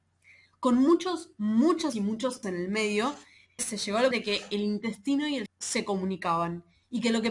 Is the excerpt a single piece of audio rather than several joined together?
no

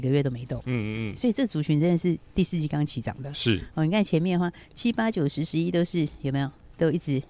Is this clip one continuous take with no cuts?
yes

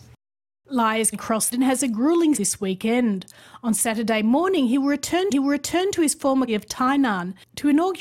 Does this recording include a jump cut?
yes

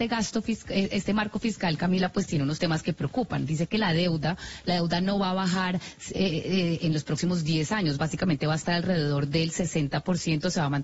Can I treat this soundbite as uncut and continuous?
yes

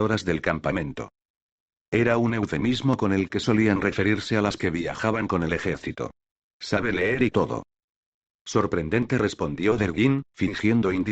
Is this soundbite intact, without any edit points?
no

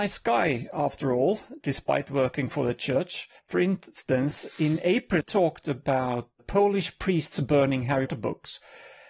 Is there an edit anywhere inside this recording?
yes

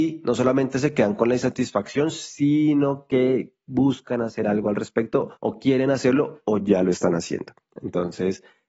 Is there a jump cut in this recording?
yes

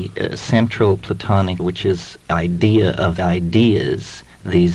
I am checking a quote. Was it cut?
yes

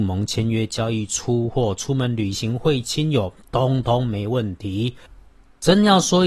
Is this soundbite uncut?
yes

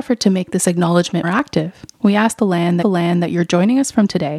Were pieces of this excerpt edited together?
yes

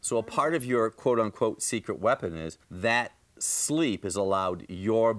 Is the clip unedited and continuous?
no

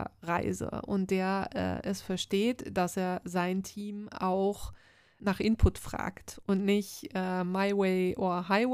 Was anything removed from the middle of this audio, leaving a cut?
no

